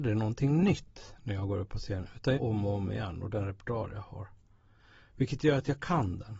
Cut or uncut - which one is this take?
cut